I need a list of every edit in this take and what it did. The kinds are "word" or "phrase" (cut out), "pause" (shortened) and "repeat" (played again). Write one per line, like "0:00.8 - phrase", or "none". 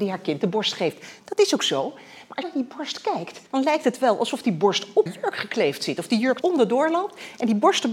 0:02.4 - phrase
0:03.5 - pause
0:05.1 - word
0:06.4 - word